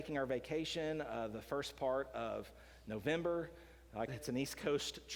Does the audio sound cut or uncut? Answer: cut